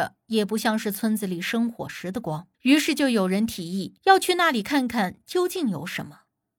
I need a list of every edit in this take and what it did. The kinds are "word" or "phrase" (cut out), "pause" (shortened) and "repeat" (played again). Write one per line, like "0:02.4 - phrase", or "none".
0:02.5 - pause
0:04.0 - pause